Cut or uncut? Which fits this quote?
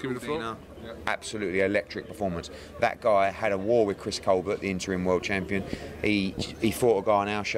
cut